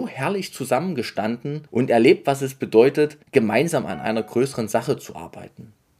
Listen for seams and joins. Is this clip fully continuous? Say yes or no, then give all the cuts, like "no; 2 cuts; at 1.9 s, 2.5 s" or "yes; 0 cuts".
no; 2 cuts; at 1.7 s, 3.2 s